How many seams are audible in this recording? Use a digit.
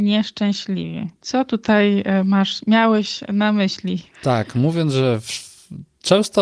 1